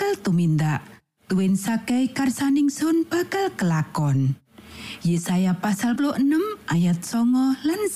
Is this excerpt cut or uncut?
cut